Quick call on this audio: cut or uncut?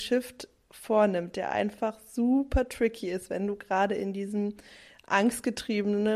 uncut